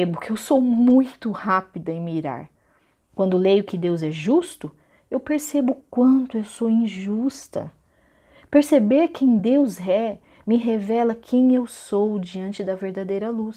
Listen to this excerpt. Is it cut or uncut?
uncut